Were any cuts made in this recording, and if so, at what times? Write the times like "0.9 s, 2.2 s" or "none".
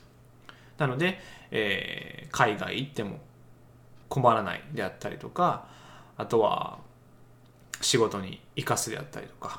4.0 s

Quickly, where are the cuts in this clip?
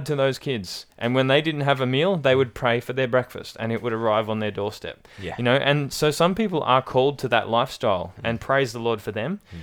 none

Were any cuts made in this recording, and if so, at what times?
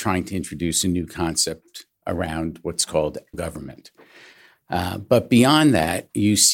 3.3 s

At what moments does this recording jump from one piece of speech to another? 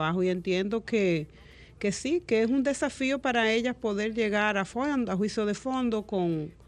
none

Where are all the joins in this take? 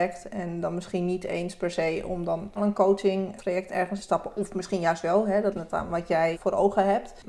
2.6 s, 3.4 s, 4.0 s, 5.5 s, 6.3 s

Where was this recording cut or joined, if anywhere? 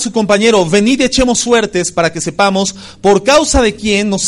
none

